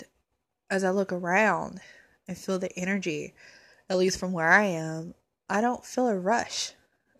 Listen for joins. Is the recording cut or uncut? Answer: uncut